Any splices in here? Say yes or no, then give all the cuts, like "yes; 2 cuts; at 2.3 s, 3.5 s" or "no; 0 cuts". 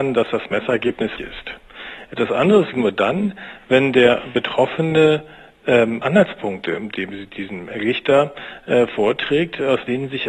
yes; 3 cuts; at 1.2 s, 2.7 s, 6.0 s